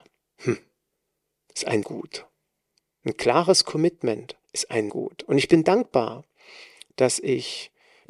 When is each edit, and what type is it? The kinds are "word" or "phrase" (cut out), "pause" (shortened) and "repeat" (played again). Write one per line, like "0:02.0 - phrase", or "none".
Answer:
0:01.8 - word
0:04.4 - pause
0:04.9 - word